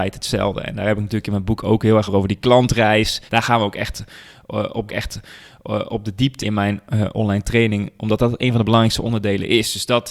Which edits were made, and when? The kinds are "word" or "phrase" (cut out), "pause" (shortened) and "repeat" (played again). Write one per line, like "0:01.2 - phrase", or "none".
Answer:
0:02.1 - word
0:03.3 - pause
0:04.9 - repeat
0:06.4 - word